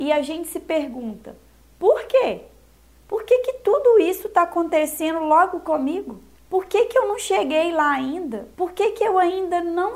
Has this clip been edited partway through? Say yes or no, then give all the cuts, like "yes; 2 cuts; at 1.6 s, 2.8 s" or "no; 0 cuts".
no; 0 cuts